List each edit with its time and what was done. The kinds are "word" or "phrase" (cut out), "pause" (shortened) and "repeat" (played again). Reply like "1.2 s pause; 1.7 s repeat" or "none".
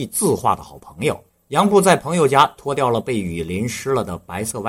1.3 s pause